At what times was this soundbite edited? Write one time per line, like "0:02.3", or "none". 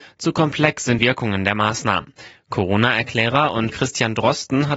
0:01.0
0:03.7